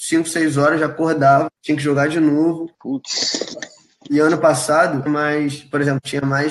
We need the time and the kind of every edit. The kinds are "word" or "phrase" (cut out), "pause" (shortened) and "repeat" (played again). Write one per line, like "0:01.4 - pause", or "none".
0:01.6 - pause
0:02.7 - pause
0:05.1 - phrase